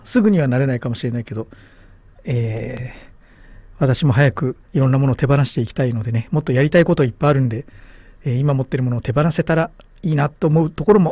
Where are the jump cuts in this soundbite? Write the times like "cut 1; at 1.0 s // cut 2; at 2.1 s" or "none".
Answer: cut 1; at 4.6 s